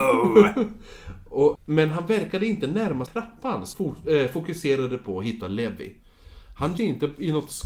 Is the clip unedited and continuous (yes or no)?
no